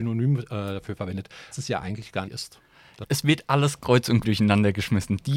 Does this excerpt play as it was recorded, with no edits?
no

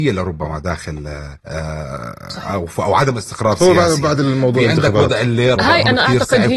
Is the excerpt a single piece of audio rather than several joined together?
no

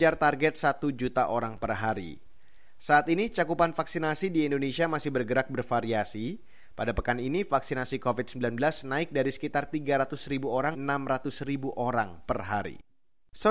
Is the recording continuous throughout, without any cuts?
no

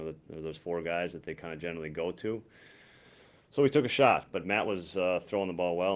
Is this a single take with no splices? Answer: yes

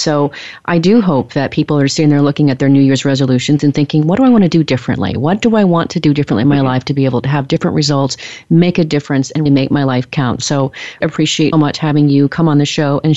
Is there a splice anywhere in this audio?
yes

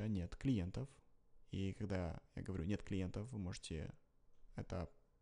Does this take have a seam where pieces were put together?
no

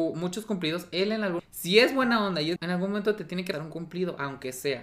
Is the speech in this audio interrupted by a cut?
yes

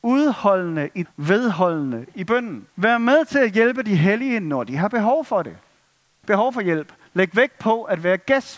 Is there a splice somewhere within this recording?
yes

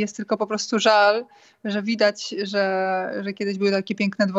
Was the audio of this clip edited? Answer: no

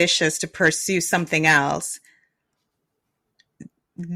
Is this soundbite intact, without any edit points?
yes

